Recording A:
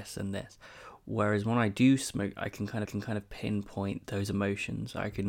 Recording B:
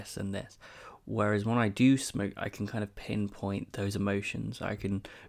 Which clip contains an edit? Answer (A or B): A